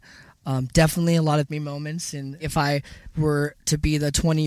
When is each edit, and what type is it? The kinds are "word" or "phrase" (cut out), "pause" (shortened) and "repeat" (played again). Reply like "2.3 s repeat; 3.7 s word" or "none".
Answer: 1.5 s word; 2.4 s word